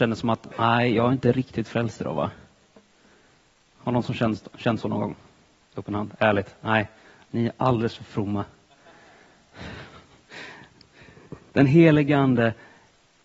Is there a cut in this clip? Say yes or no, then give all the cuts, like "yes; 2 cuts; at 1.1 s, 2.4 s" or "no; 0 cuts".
no; 0 cuts